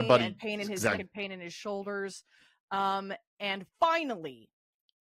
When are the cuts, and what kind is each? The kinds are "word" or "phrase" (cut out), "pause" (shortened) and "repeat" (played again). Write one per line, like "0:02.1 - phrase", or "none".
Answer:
0:00.9 - word
0:03.7 - pause